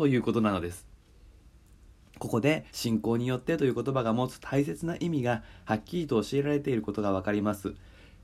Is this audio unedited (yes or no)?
no